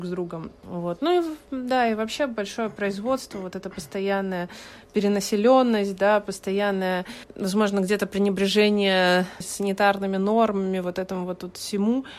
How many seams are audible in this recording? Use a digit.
0